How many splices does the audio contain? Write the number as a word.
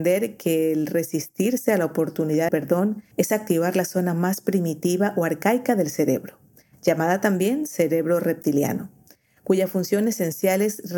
two